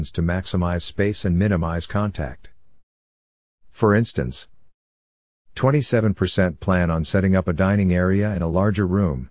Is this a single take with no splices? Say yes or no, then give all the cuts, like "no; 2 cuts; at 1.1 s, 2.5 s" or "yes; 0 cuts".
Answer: yes; 0 cuts